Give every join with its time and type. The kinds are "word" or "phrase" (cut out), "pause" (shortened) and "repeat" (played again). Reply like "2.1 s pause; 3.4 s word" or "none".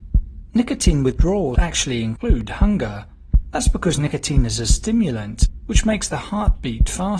1.5 s word